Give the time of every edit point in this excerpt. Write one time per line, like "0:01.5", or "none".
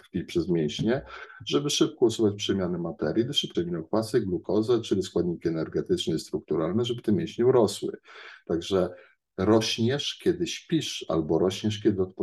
0:03.5